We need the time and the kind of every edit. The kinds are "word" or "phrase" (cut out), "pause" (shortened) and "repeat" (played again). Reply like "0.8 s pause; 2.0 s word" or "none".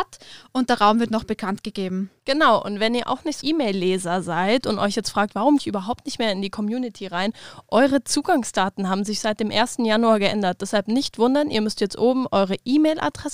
2.2 s pause; 3.4 s word; 5.6 s word